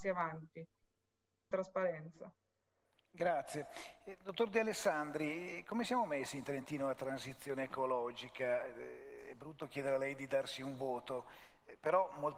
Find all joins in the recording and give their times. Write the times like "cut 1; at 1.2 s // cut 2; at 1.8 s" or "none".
cut 1; at 1.5 s